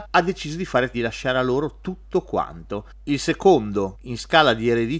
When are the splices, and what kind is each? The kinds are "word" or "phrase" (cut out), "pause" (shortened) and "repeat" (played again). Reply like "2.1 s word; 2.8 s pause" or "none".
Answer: 0.9 s phrase